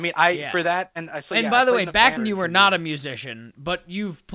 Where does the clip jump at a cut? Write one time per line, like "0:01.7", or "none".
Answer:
0:02.2